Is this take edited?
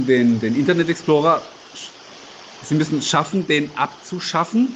no; 0 cuts

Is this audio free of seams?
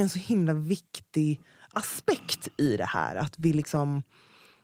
yes; 0 cuts

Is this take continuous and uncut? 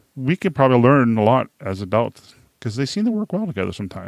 yes; 0 cuts

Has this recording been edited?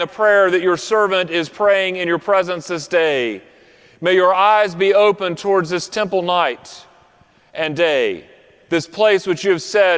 no; 0 cuts

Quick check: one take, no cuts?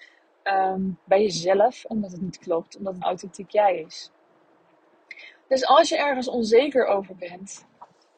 no; 1 cut; at 3.0 s

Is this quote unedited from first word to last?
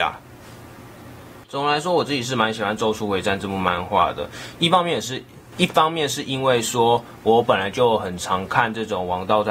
no; 1 cut; at 1.4 s

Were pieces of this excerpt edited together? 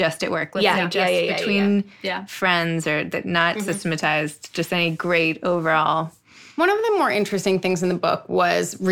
no; 0 cuts

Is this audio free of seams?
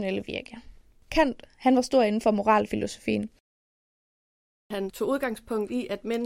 yes; 0 cuts

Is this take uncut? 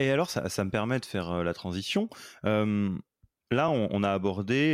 yes; 0 cuts

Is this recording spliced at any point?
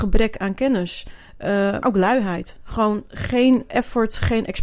yes; 2 cuts; at 1.8 s, 3.7 s

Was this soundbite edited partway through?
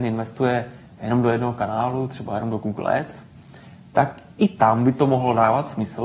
no; 0 cuts

